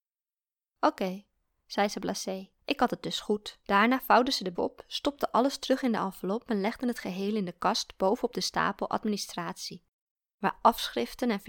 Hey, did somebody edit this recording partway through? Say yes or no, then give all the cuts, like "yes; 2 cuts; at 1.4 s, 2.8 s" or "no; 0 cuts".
yes; 3 cuts; at 2.6 s, 3.6 s, 4.5 s